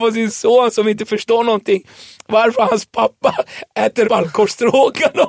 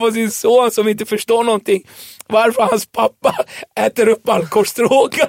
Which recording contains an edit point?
first; 1 cut; at 4.0 s

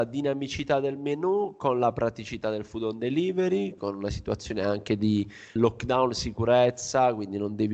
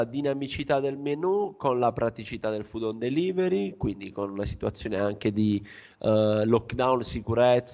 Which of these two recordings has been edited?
first; 2 cuts; at 3.8 s, 5.6 s

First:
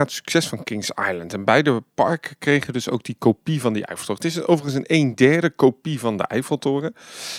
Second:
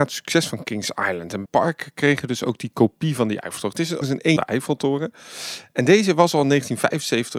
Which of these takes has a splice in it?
second; 3 cuts; at 1.5 s, 4.0 s, 4.4 s

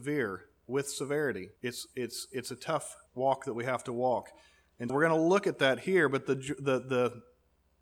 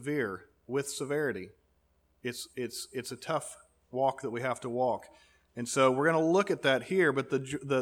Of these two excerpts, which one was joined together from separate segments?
first; 3 cuts; at 1.6 s, 3.1 s, 4.9 s

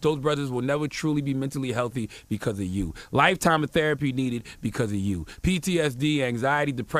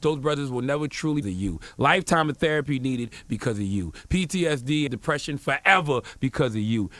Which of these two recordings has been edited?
second; 2 cuts; at 1.2 s, 4.9 s

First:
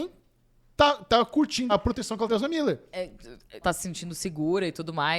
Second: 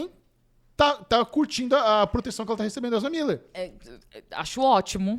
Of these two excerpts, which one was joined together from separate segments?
first; 3 cuts; at 1.7 s, 2.3 s, 3.6 s

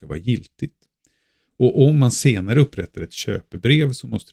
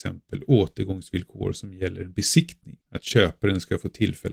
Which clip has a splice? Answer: second; 1 cut; at 2.8 s

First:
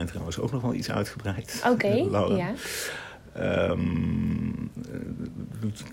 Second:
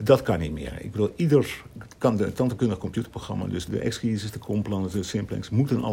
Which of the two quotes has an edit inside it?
second; 1 cut; at 3.7 s

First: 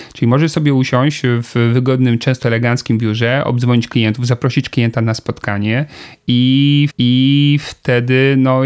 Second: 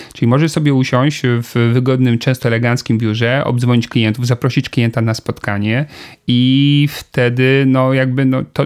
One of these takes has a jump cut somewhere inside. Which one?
first; 1 cut; at 6.9 s

